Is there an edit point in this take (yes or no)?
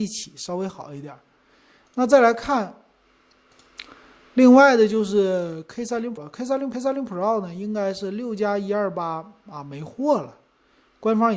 yes